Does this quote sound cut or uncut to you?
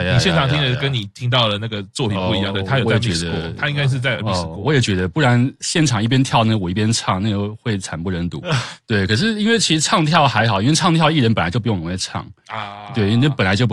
uncut